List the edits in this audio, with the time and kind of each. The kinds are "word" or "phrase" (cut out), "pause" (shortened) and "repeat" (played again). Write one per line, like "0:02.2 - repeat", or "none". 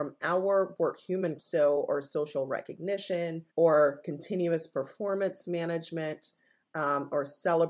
0:01.4 - word
0:03.5 - pause